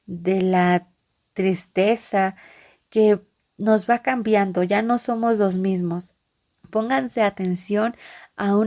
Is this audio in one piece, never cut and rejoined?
yes; 0 cuts

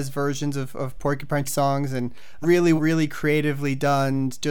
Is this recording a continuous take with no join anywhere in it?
no; 3 cuts; at 1.5 s, 2.4 s, 2.8 s

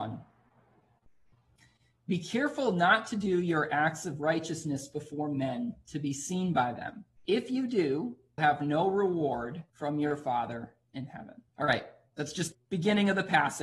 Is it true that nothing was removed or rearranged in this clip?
no; 5 cuts; at 7.2 s, 8.4 s, 9.7 s, 11.5 s, 12.5 s

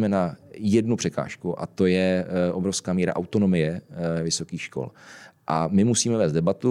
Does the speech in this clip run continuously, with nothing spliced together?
yes; 0 cuts

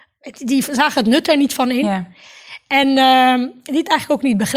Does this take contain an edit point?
no; 0 cuts

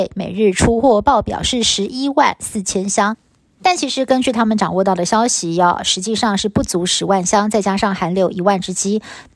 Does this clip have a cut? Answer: no; 0 cuts

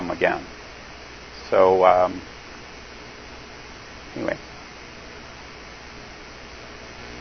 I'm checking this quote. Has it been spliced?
no; 0 cuts

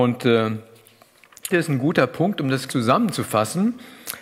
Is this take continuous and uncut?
no; 2 cuts; at 1.5 s, 2.7 s

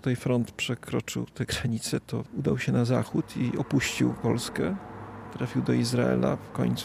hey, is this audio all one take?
yes; 0 cuts

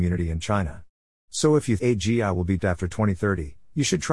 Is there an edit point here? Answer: yes; 2 cuts; at 1.8 s, 2.6 s

